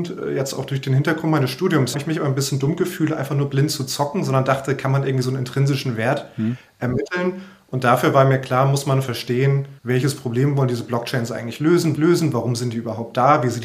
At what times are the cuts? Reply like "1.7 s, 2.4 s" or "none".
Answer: 1.9 s, 9.8 s, 12.0 s